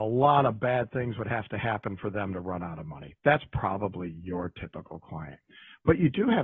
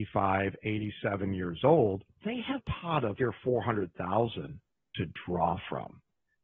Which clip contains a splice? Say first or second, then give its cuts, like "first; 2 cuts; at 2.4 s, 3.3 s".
second; 3 cuts; at 2.2 s, 2.6 s, 3.2 s